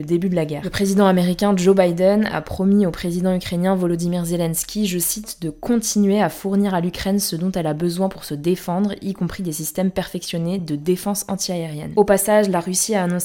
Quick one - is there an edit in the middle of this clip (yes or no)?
no